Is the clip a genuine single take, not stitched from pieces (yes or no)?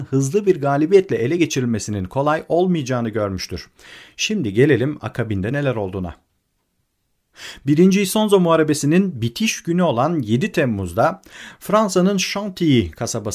yes